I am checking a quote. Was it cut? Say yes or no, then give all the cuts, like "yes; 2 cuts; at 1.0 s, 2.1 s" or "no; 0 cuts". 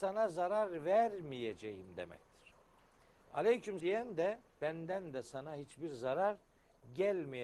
yes; 2 cuts; at 3.8 s, 4.5 s